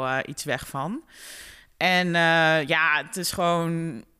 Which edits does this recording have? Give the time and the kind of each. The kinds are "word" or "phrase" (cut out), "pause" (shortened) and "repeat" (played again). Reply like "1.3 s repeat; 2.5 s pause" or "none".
none